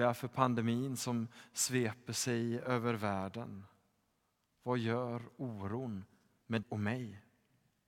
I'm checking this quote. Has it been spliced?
yes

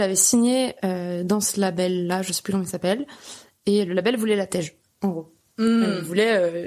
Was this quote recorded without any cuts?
yes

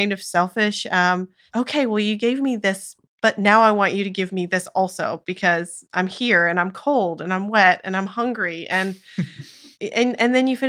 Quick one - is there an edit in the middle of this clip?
no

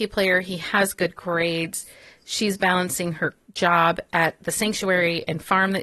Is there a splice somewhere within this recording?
no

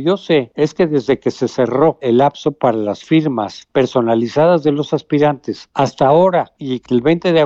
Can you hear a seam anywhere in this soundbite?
no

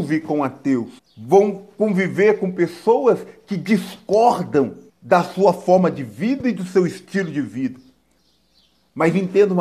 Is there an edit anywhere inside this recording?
yes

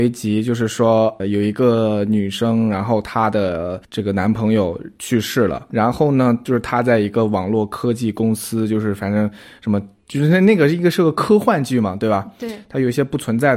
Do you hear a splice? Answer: yes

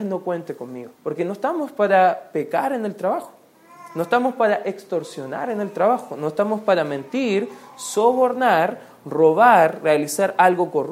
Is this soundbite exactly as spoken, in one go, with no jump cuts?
no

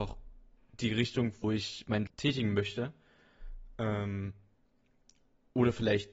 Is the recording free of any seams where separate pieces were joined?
no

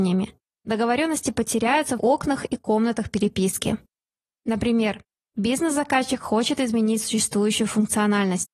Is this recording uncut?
no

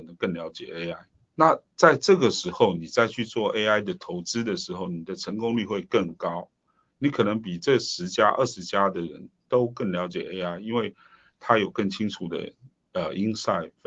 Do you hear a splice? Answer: no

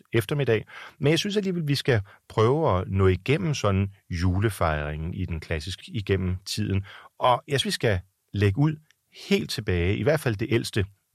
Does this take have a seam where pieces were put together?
yes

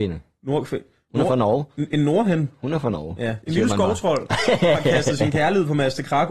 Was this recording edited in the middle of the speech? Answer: no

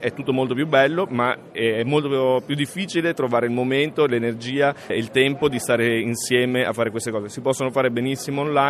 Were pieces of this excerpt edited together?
no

